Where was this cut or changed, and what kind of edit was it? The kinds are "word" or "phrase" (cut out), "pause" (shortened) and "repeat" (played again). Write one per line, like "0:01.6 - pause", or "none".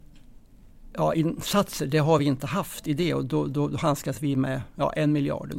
none